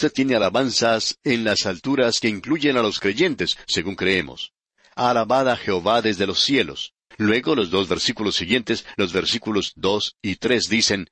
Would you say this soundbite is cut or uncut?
cut